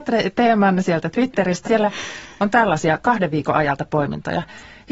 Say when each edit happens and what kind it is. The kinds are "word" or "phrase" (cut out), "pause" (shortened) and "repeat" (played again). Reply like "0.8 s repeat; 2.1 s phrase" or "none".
1.6 s word